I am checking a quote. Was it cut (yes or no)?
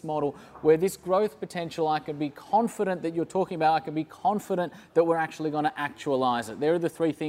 no